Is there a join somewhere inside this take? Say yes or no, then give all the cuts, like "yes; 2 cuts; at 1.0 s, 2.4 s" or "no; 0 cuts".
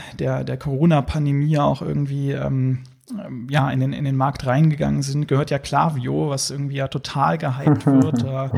no; 0 cuts